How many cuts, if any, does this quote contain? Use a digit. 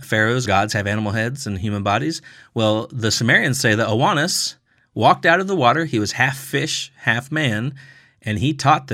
0